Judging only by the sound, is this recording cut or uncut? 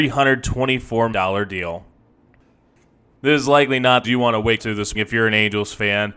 cut